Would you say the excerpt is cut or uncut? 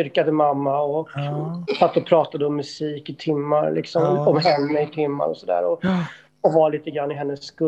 uncut